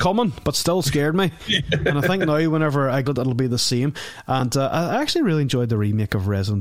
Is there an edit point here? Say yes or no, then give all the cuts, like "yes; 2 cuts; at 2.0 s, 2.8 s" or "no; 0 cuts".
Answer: yes; 1 cut; at 3.1 s